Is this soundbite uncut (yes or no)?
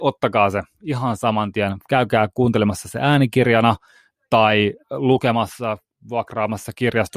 yes